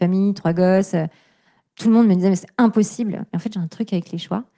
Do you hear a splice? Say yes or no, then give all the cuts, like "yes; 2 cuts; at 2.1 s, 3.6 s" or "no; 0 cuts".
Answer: no; 0 cuts